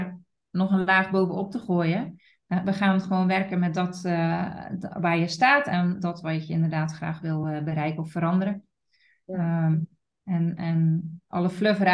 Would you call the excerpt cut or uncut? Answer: uncut